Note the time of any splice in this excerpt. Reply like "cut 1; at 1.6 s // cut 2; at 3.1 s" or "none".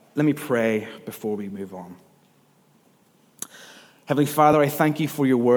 none

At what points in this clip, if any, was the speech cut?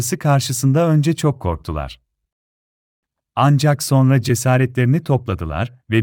none

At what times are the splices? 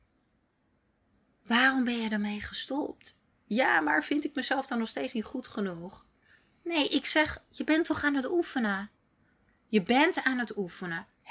none

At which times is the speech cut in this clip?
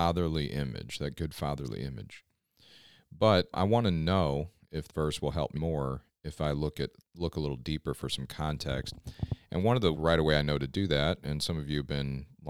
cut 1; at 3.5 s // cut 2; at 4.9 s // cut 3; at 5.5 s // cut 4; at 9.9 s

